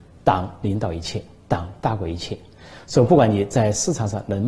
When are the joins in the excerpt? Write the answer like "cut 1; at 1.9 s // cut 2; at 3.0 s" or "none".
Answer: none